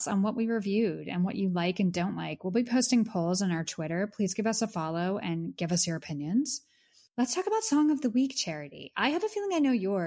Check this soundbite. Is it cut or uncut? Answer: uncut